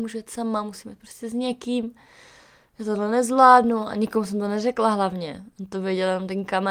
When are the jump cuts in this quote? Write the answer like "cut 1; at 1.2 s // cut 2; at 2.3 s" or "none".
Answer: none